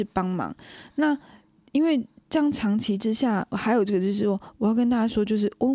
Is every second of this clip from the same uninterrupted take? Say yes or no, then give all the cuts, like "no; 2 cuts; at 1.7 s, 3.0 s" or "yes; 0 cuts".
no; 1 cut; at 3.5 s